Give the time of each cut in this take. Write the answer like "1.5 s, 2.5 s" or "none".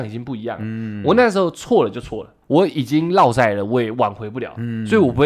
2.4 s